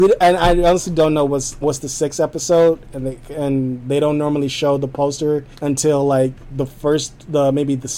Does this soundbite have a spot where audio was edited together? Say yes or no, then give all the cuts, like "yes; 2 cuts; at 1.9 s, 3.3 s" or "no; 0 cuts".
yes; 2 cuts; at 1.6 s, 5.5 s